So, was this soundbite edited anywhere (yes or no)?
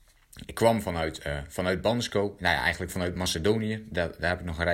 no